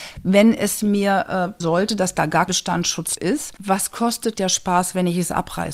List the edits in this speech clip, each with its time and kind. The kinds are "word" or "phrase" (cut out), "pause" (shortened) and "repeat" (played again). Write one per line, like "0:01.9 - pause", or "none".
0:01.6 - word
0:02.5 - word
0:03.2 - word
0:04.4 - word